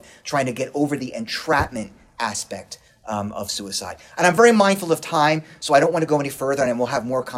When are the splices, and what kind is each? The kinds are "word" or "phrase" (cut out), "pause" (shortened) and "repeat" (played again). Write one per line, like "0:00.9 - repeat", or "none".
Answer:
none